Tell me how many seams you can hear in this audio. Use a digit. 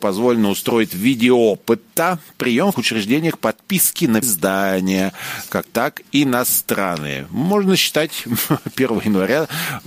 4